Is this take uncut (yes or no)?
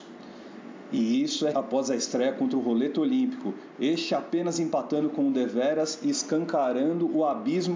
no